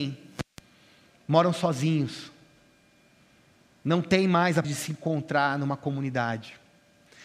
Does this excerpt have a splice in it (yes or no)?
yes